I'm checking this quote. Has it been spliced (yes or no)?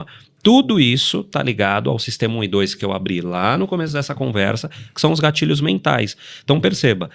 no